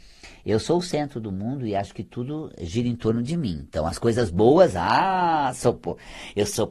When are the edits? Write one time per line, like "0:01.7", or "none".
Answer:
none